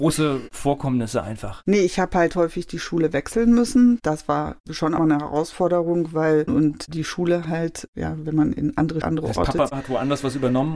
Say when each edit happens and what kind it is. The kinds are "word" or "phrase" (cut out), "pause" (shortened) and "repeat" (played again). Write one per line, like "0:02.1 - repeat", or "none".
0:05.0 - phrase
0:06.5 - phrase
0:09.0 - word